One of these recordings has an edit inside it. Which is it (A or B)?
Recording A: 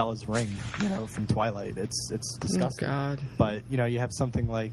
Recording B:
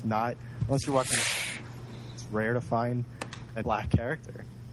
B